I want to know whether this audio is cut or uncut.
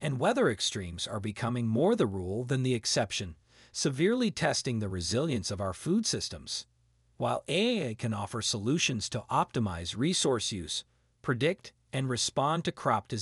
uncut